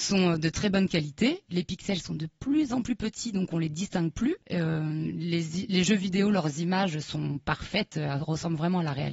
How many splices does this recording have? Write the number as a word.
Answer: one